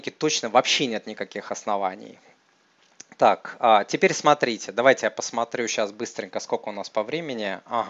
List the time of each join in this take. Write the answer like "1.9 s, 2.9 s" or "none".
none